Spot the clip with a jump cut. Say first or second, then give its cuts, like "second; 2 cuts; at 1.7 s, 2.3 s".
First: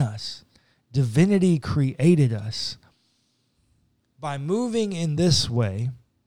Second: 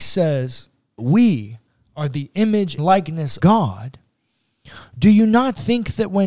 second; 3 cuts; at 1.0 s, 2.8 s, 3.4 s